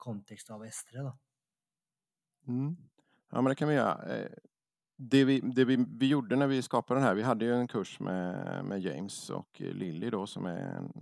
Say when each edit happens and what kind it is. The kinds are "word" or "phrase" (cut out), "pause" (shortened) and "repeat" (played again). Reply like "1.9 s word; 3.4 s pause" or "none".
none